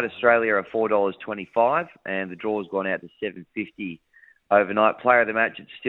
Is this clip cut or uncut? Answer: uncut